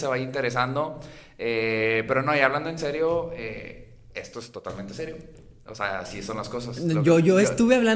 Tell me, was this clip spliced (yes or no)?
no